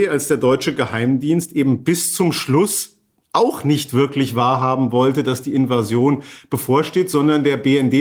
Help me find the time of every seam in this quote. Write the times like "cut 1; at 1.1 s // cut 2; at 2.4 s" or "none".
none